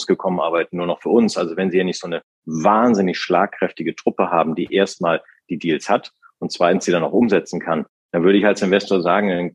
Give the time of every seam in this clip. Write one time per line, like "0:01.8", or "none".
none